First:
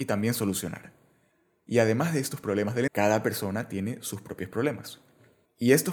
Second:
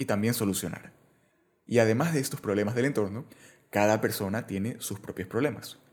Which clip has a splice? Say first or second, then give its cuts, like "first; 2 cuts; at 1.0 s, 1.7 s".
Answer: first; 1 cut; at 2.9 s